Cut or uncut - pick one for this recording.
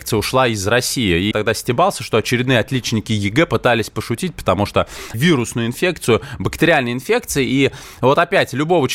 cut